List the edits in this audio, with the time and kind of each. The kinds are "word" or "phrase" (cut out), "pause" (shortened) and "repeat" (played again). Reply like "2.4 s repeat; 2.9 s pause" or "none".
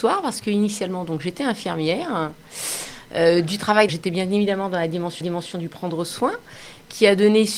3.9 s word; 5.2 s repeat